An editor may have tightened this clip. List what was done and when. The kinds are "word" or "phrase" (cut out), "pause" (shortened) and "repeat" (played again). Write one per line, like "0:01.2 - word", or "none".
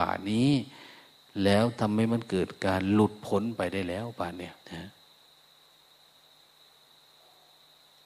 0:04.6 - pause